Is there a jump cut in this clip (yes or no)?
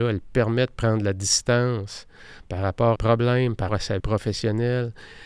yes